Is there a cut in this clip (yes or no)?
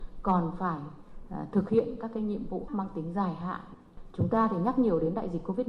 yes